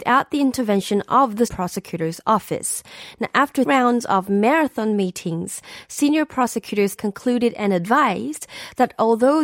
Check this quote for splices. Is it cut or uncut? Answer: cut